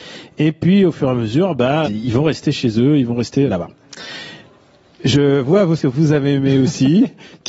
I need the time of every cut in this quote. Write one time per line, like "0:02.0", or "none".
0:01.8
0:03.5
0:05.8